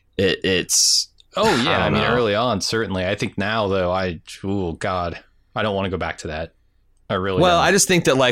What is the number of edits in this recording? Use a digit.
0